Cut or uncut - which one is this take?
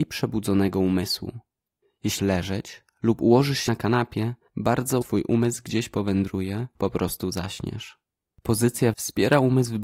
cut